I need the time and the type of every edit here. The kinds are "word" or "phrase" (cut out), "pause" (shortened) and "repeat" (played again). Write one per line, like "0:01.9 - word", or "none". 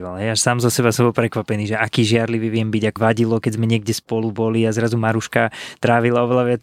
0:03.0 - word

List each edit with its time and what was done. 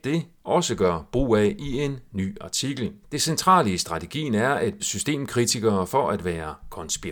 0:03.0 - pause
0:04.8 - word

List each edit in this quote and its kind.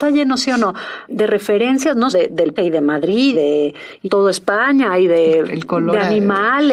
0:01.1 - word
0:02.1 - word
0:02.6 - word
0:03.3 - word
0:04.0 - word
0:05.4 - word

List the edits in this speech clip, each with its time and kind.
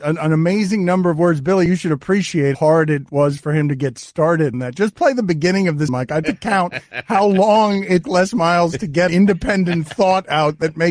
0:02.5 - word
0:04.5 - word
0:05.9 - word
0:06.2 - word
0:08.0 - word
0:09.1 - word

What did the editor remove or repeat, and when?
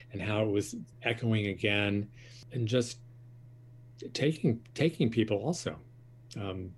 0:00.9 - pause

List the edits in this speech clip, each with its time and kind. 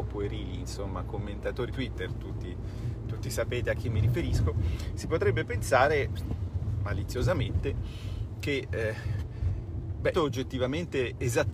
0:01.7 - word
0:10.1 - word

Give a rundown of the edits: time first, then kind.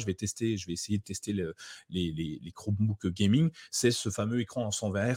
none

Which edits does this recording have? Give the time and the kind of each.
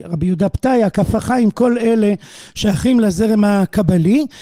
none

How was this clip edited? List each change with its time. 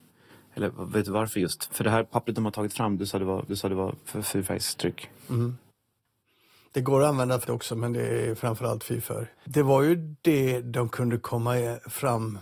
0:03.5 - repeat
0:07.4 - word
0:09.3 - pause

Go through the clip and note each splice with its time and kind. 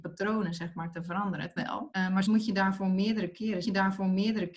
0:01.6 - word
0:02.3 - word
0:03.6 - repeat

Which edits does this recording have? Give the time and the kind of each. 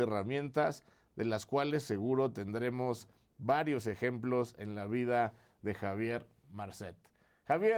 none

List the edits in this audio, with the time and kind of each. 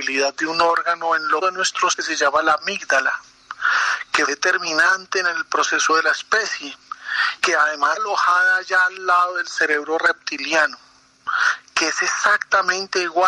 0:01.4 - word
0:01.9 - word
0:04.3 - word
0:05.9 - word
0:07.4 - word
0:08.0 - word

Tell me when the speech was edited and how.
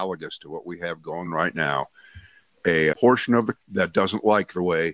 0:01.3 - word
0:02.9 - word
0:03.6 - word

